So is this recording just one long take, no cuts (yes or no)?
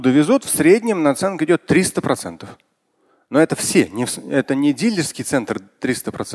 yes